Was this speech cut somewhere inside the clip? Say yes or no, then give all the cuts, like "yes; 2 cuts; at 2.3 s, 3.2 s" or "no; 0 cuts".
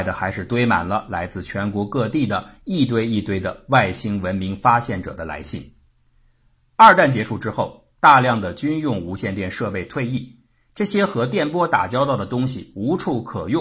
no; 0 cuts